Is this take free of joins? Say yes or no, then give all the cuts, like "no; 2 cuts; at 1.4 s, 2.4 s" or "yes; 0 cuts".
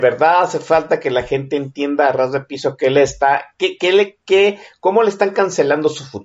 yes; 0 cuts